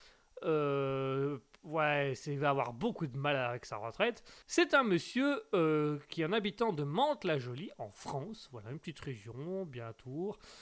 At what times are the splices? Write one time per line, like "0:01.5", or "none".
0:04.4

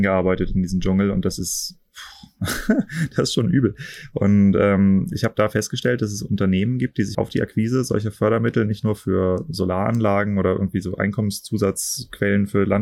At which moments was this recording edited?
0:07.1

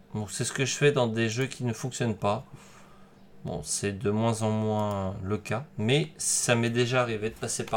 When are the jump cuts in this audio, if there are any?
0:05.7

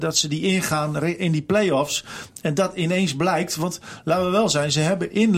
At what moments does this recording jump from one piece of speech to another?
none

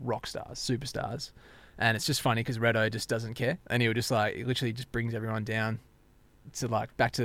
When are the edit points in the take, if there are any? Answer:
none

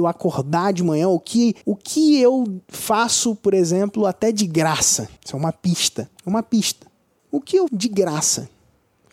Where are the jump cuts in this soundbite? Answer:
0:01.6
0:05.2
0:06.2
0:07.2
0:07.7

